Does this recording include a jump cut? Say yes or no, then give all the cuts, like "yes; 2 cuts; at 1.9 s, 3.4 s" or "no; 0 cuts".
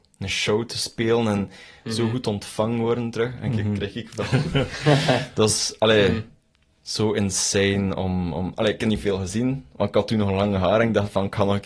no; 0 cuts